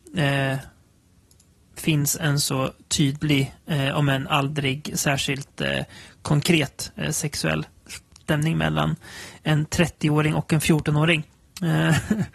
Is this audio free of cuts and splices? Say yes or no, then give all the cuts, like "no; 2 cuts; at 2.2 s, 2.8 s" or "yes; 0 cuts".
yes; 0 cuts